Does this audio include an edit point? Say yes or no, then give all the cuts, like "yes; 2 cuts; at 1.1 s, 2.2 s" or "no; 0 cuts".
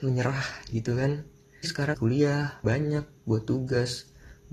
yes; 3 cuts; at 1.6 s, 1.9 s, 2.6 s